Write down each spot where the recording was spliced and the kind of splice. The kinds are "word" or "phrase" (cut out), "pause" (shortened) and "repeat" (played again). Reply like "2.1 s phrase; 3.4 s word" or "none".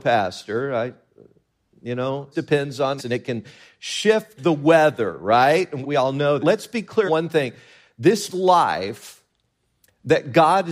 2.3 s word; 3.0 s word; 4.4 s word; 5.8 s word; 6.4 s word; 7.1 s word; 8.3 s word